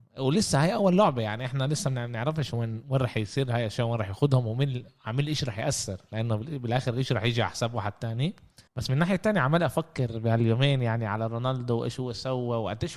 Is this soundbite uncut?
no; 2 cuts; at 2.8 s, 8.7 s

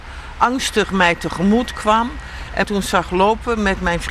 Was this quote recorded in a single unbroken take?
no; 1 cut; at 2.6 s

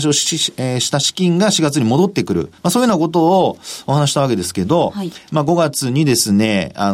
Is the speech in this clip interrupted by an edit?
yes; 1 cut; at 2.6 s

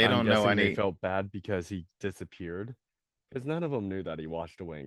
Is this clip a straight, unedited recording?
yes; 0 cuts

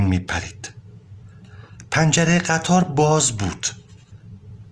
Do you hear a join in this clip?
no; 0 cuts

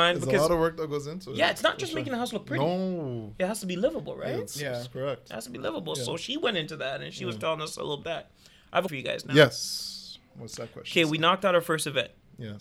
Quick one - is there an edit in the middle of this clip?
yes; 2 cuts; at 8.0 s, 8.9 s

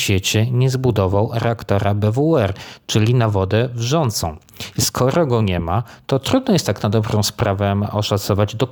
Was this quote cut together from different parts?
no; 0 cuts

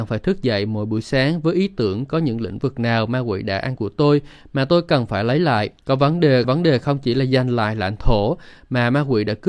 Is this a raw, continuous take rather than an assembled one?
no; 3 cuts; at 3.8 s, 5.8 s, 6.4 s

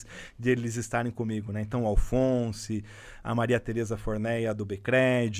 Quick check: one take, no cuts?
yes; 0 cuts

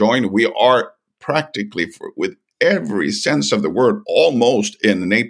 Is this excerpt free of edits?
yes; 0 cuts

